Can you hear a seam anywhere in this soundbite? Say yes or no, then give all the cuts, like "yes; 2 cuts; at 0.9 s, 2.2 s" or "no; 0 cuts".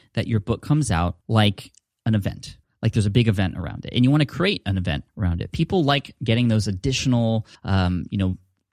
yes; 4 cuts; at 1.2 s, 2.6 s, 5.1 s, 7.6 s